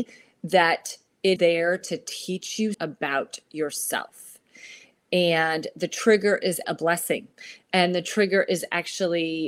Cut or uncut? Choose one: cut